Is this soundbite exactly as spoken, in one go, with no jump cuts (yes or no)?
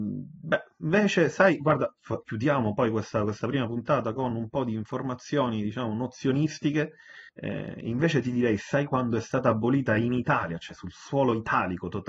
no